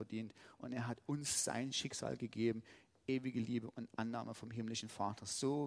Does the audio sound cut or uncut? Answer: uncut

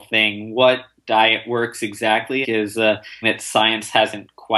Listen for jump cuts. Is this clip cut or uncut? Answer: cut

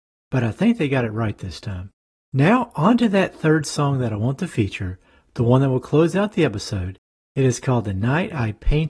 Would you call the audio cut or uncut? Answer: uncut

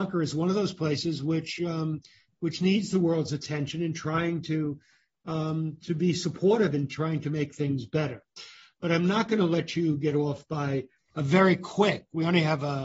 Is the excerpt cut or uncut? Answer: cut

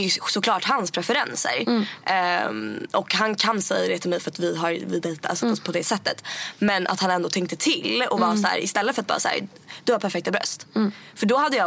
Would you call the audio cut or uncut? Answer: cut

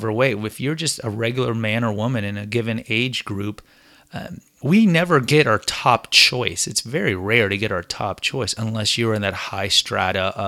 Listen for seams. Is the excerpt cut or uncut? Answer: uncut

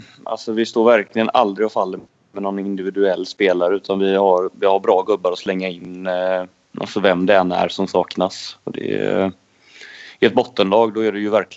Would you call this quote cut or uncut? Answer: uncut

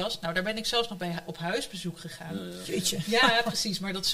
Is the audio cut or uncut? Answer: uncut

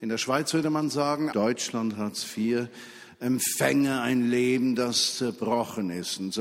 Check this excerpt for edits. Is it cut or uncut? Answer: cut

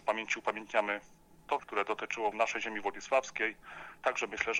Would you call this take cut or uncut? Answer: cut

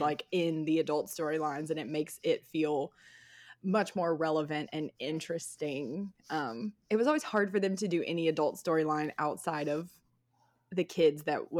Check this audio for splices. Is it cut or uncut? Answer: uncut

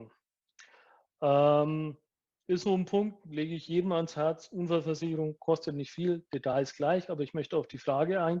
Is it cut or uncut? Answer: uncut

